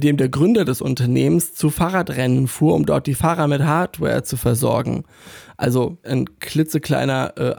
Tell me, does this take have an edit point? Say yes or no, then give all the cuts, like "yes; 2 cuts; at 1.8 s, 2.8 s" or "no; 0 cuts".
yes; 1 cut; at 6.0 s